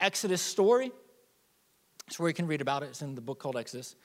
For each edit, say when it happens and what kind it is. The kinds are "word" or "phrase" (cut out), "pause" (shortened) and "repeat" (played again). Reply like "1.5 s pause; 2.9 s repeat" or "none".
none